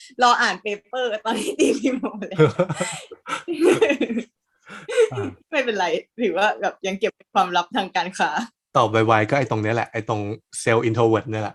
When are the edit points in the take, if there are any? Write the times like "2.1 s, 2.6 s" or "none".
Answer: 5.4 s, 8.7 s